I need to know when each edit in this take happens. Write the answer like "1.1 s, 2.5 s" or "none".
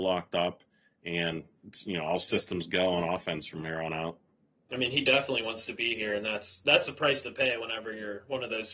none